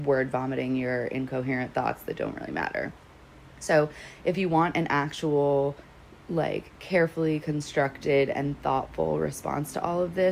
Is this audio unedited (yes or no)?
no